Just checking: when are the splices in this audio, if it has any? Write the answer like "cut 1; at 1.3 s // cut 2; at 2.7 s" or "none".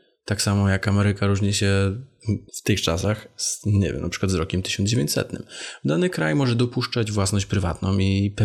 cut 1; at 2.5 s